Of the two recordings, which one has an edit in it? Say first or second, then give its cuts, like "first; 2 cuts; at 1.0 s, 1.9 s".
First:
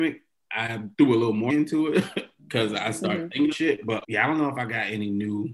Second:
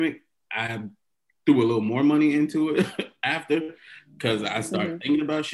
first; 5 cuts; at 0.9 s, 1.5 s, 2.4 s, 3.5 s, 4.0 s